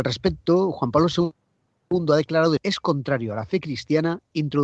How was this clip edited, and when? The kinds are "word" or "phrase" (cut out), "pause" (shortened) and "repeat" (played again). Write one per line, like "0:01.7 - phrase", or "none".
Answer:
0:02.6 - word